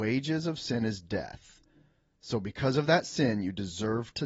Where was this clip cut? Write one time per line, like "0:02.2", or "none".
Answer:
none